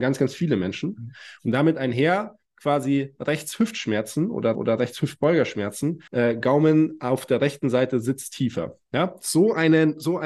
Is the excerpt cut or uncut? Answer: cut